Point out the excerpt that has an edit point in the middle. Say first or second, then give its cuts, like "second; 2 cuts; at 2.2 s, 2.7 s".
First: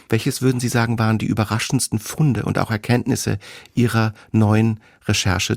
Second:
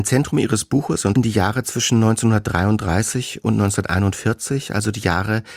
second; 1 cut; at 1.1 s